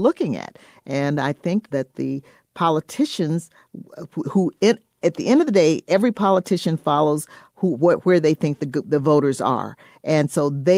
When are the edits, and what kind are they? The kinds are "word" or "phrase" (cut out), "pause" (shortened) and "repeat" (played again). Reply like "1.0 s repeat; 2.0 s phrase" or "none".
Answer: none